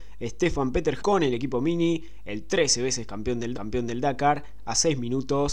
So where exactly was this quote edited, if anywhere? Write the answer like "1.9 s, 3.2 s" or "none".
1.0 s, 3.5 s